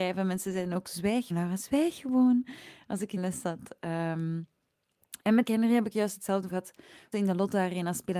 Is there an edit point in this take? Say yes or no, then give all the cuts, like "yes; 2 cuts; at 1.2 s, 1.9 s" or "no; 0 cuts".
yes; 5 cuts; at 1.3 s, 3.2 s, 5.4 s, 6.5 s, 7.1 s